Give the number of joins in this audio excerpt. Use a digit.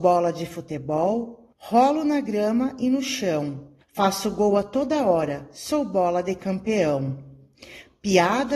2